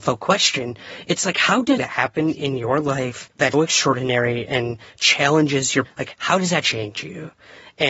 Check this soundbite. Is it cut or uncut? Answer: cut